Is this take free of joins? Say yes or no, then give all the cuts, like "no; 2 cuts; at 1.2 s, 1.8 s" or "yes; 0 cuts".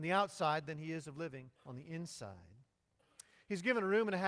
no; 1 cut; at 1.6 s